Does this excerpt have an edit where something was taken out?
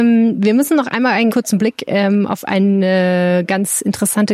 yes; 1 cut; at 1.3 s

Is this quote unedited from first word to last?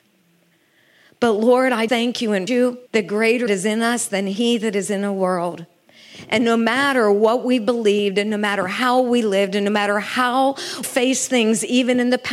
no; 5 cuts; at 1.9 s, 2.5 s, 2.9 s, 3.5 s, 10.8 s

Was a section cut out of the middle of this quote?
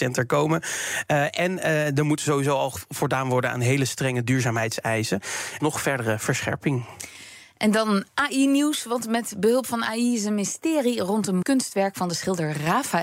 yes; 3 cuts; at 5.6 s, 8.1 s, 11.4 s

